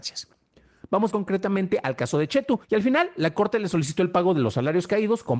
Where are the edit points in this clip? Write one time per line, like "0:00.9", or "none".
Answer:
0:01.1
0:02.6